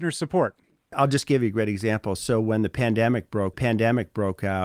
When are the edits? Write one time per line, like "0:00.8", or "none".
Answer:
0:03.5